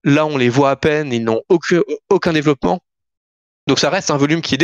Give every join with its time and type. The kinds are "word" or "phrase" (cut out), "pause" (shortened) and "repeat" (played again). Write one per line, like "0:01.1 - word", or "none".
none